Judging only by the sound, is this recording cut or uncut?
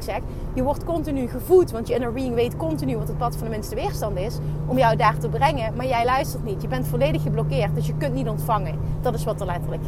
uncut